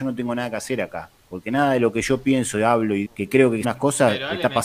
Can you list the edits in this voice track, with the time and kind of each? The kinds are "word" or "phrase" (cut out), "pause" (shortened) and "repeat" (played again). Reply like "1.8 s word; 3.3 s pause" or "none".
1.2 s pause; 3.0 s word; 3.6 s word